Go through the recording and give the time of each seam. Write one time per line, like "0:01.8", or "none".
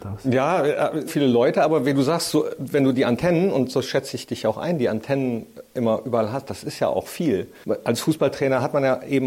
0:01.1